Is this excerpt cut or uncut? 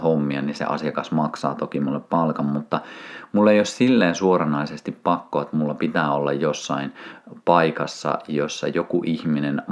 uncut